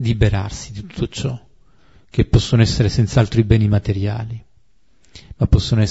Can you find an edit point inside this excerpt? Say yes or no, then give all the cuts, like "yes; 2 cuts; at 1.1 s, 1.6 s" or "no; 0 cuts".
no; 0 cuts